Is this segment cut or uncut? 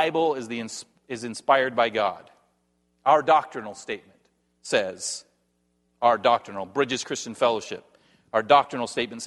uncut